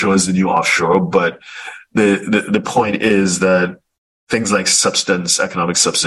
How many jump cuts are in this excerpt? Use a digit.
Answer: 0